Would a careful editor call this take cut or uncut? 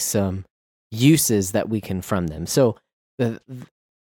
cut